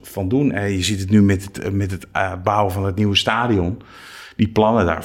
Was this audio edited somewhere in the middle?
no; 0 cuts

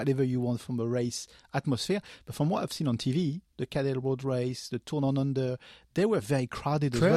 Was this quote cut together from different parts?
no; 0 cuts

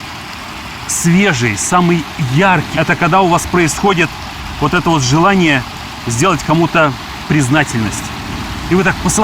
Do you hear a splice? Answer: yes; 1 cut; at 2.7 s

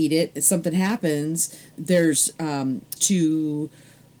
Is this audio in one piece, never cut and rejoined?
no; 2 cuts; at 1.7 s, 3.0 s

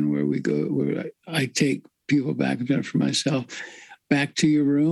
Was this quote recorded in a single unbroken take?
yes; 0 cuts

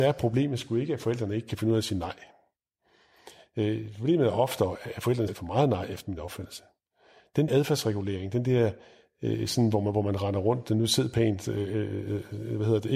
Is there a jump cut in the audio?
yes; 2 cuts; at 5.3 s, 7.5 s

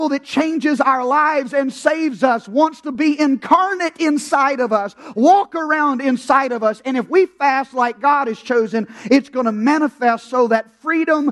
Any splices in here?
no; 0 cuts

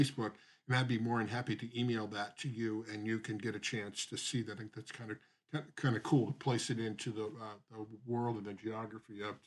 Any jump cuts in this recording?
no; 0 cuts

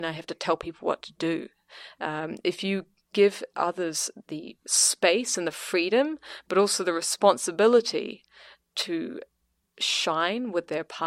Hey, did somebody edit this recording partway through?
no; 0 cuts

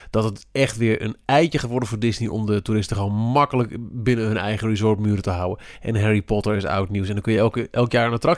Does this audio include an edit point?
no; 0 cuts

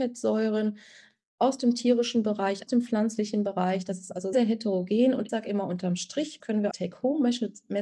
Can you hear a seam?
yes; 5 cuts; at 2.7 s, 4.3 s, 5.3 s, 6.4 s, 6.7 s

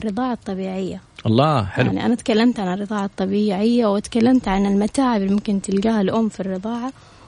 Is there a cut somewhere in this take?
no; 0 cuts

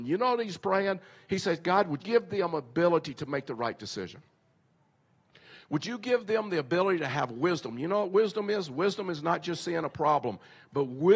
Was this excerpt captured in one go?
no; 1 cut; at 2.0 s

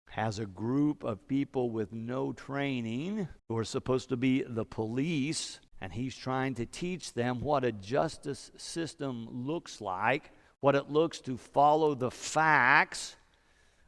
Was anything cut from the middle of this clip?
yes; 3 cuts; at 3.4 s, 5.7 s, 10.5 s

